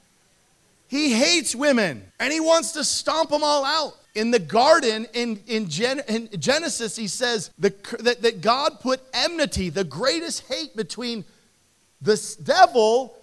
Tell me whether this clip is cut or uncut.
cut